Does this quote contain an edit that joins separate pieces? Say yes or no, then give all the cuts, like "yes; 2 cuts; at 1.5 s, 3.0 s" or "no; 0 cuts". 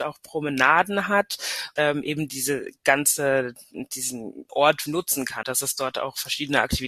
yes; 4 cuts; at 1.8 s, 4.5 s, 4.9 s, 5.4 s